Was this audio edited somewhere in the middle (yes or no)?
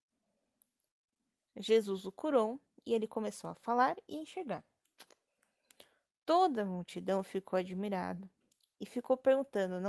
no